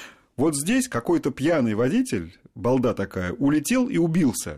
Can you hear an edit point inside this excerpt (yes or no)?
no